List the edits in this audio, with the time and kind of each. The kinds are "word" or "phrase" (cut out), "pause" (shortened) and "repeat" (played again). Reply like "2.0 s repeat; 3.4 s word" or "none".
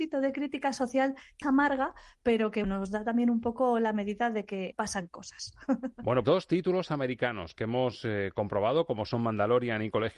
1.4 s phrase; 2.6 s word; 4.7 s phrase; 6.2 s word